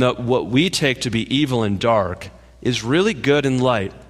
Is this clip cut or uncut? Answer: uncut